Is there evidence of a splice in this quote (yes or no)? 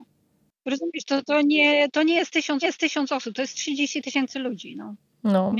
yes